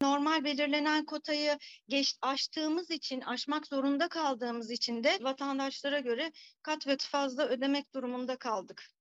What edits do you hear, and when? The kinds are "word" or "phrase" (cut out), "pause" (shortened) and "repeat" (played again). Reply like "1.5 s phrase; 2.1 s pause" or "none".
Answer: 5.2 s word; 7.0 s word